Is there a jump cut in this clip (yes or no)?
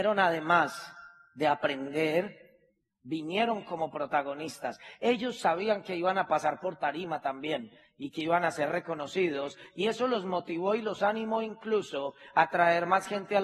no